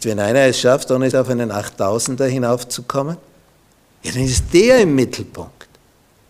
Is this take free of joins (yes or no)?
no